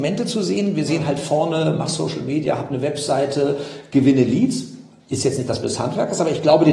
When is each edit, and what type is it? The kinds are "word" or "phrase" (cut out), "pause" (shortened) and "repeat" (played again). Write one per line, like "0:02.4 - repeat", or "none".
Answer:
0:05.6 - word